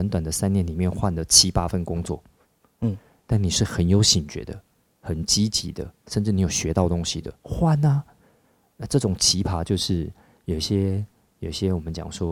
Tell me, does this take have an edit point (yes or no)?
no